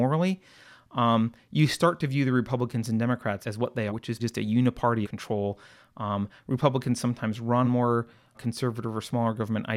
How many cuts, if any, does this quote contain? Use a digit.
6